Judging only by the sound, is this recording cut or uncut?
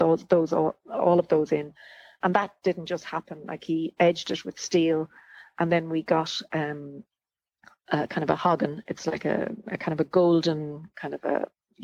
uncut